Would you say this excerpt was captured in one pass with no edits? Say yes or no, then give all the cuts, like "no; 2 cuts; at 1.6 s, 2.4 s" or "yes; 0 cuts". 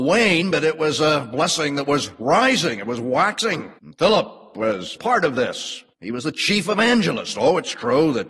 no; 3 cuts; at 3.8 s, 5.0 s, 5.9 s